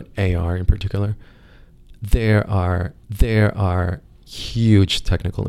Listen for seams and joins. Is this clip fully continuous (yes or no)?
no